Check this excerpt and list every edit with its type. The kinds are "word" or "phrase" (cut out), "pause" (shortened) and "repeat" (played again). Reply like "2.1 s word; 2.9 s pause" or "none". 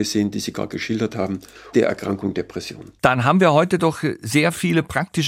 1.7 s word